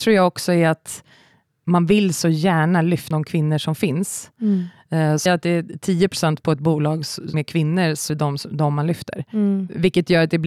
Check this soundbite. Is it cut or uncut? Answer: cut